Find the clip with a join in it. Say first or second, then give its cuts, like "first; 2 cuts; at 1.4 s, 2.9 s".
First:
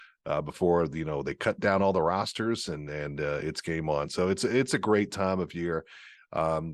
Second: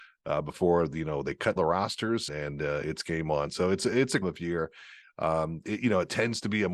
second; 3 cuts; at 1.6 s, 2.3 s, 4.2 s